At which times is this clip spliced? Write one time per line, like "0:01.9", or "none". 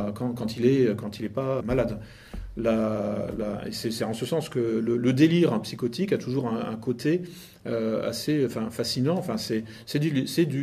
0:01.6